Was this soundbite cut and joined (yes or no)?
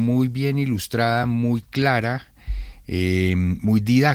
no